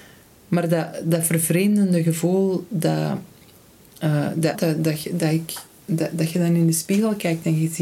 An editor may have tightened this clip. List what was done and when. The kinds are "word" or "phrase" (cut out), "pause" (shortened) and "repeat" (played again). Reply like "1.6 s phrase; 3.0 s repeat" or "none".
4.5 s phrase